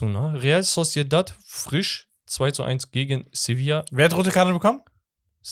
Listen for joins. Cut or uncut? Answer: uncut